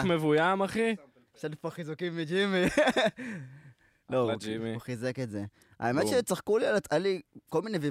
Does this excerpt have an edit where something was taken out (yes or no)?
no